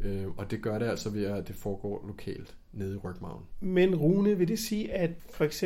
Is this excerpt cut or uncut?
uncut